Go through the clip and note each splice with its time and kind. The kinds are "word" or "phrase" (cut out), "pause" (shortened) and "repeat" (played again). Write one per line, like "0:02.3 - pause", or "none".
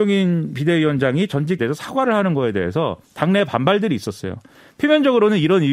0:01.6 - phrase